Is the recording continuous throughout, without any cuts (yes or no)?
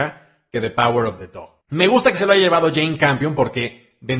no